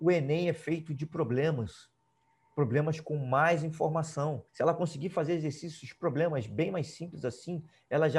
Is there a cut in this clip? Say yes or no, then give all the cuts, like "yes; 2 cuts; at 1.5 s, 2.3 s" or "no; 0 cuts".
yes; 1 cut; at 4.5 s